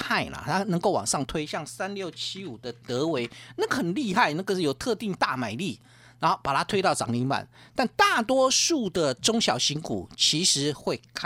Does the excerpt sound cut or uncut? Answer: uncut